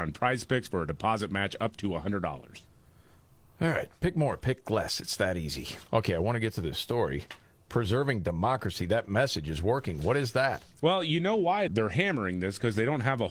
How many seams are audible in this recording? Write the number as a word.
two